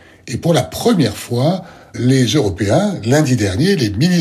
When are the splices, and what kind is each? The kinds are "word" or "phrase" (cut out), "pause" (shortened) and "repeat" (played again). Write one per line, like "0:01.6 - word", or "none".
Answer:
0:01.9 - word